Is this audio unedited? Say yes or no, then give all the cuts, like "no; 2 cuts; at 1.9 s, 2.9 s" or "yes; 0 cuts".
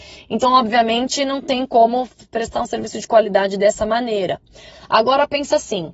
yes; 0 cuts